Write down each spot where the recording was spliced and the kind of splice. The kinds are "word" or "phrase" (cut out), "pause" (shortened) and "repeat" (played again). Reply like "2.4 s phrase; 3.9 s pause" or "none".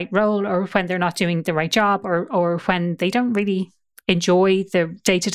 none